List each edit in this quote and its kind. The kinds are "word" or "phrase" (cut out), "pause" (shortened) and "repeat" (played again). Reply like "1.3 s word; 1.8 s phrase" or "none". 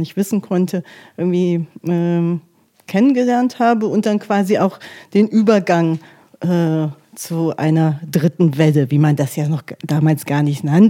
none